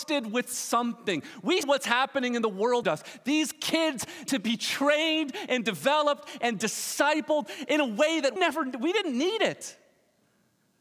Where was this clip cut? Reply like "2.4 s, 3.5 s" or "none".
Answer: 1.6 s, 2.8 s, 4.3 s, 8.4 s